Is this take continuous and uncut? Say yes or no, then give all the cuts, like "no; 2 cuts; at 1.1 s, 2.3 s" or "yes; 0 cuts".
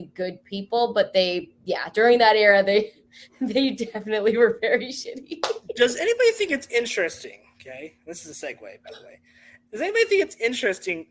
yes; 0 cuts